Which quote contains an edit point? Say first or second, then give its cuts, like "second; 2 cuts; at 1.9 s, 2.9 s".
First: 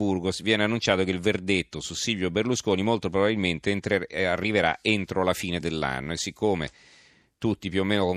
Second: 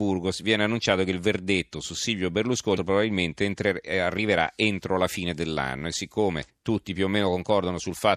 second; 2 cuts; at 2.8 s, 6.5 s